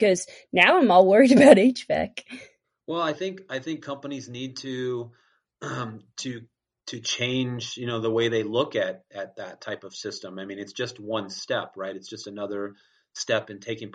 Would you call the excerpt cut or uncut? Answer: uncut